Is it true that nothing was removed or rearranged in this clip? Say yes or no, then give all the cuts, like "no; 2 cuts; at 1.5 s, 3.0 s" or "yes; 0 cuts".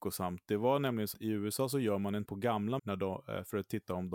no; 3 cuts; at 1.1 s, 2.3 s, 2.8 s